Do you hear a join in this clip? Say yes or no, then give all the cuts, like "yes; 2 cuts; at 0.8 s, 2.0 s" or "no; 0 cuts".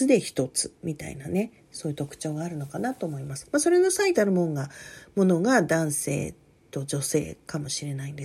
no; 0 cuts